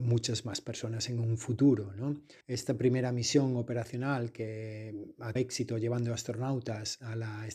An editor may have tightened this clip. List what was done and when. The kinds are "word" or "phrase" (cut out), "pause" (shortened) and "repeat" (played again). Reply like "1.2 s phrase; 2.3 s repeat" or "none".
2.4 s pause; 5.4 s word